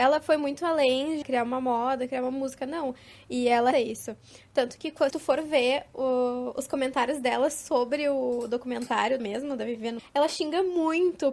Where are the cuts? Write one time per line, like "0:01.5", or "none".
0:01.2
0:03.7
0:05.1
0:09.2
0:10.0